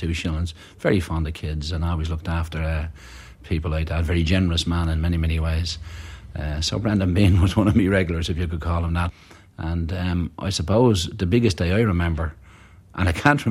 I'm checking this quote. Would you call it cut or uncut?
uncut